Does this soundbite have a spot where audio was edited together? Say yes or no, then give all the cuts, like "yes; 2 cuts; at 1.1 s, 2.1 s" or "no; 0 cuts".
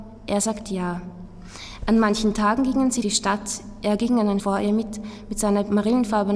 yes; 2 cuts; at 3.0 s, 4.4 s